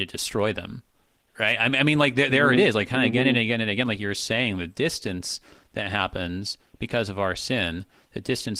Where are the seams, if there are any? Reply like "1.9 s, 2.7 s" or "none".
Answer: none